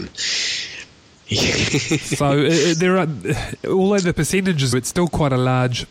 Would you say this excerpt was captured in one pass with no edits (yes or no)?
no